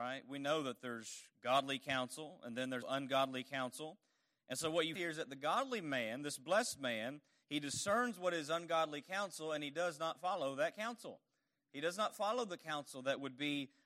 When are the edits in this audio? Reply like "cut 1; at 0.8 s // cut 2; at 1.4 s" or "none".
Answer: cut 1; at 2.8 s // cut 2; at 5.0 s